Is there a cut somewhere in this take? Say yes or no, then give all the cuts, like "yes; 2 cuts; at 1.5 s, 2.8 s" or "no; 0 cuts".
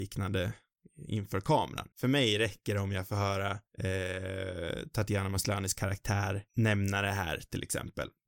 yes; 3 cuts; at 1.9 s, 3.7 s, 6.5 s